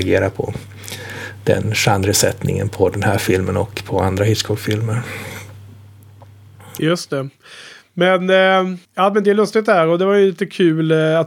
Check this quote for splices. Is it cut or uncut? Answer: cut